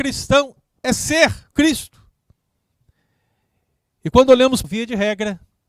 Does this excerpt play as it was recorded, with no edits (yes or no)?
no